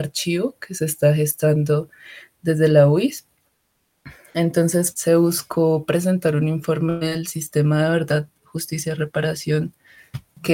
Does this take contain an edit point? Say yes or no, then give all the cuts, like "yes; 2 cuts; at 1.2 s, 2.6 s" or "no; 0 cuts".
yes; 1 cut; at 4.9 s